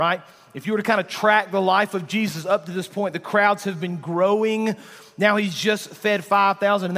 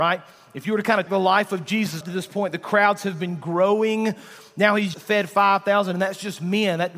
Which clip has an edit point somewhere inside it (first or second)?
second